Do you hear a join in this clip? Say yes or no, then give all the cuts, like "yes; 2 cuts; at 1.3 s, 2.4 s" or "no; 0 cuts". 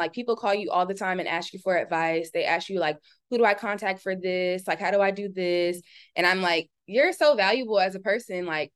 no; 0 cuts